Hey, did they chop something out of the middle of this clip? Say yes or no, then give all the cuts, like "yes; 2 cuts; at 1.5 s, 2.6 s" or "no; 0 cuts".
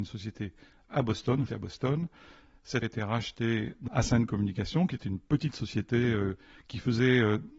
yes; 3 cuts; at 1.5 s, 2.8 s, 3.9 s